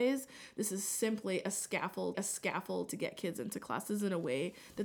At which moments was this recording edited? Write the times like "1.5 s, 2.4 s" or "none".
2.1 s